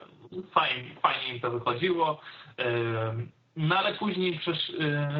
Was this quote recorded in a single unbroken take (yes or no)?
yes